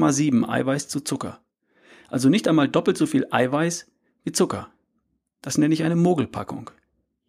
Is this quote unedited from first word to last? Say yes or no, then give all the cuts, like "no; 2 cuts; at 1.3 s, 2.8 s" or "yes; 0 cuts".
yes; 0 cuts